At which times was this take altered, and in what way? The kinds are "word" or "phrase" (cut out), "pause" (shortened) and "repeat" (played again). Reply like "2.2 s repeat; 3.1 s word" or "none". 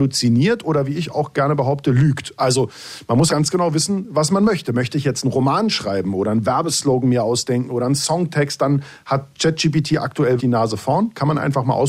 3.3 s word; 10.4 s word

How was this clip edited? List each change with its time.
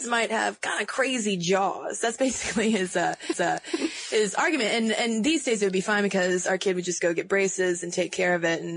3.3 s repeat

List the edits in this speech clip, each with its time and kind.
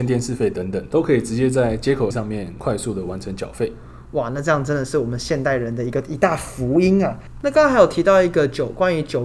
2.1 s word

